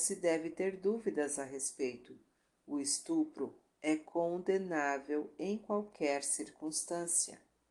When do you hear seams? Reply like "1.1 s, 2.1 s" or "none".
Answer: none